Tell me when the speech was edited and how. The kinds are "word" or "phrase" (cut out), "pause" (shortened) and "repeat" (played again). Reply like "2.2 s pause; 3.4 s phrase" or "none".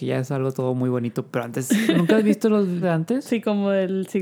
1.9 s word; 2.8 s word